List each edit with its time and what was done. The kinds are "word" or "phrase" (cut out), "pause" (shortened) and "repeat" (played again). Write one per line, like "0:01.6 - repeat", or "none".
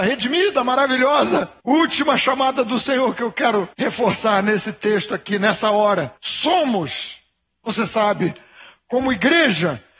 0:01.6 - pause
0:03.7 - pause
0:06.2 - pause